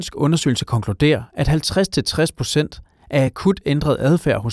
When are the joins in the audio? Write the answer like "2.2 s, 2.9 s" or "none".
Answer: none